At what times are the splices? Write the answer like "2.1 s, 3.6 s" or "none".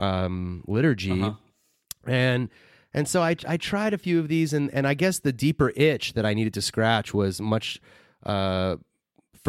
none